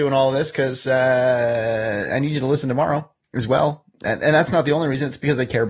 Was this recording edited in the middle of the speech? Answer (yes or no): no